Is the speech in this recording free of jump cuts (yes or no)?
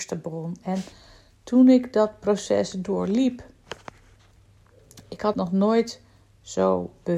no